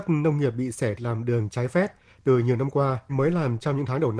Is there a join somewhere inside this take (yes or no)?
yes